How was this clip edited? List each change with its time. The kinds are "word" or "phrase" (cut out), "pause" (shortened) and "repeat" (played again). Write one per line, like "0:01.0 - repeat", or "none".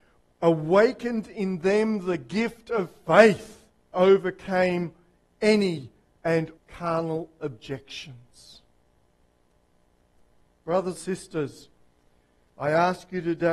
0:03.9 - word
0:06.6 - word
0:11.0 - word